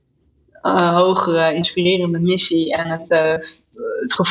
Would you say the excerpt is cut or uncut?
uncut